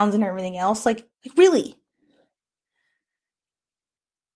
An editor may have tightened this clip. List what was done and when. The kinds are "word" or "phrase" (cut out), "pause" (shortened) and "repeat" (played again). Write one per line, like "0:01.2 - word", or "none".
0:01.1 - pause